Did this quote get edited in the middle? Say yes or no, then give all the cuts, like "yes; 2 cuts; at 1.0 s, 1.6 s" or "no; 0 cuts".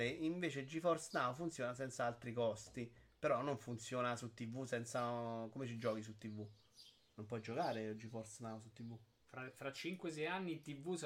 no; 0 cuts